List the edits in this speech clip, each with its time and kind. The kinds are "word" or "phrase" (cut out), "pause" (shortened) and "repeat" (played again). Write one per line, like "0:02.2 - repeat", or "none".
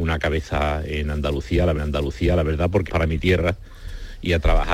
0:01.8 - repeat
0:02.9 - phrase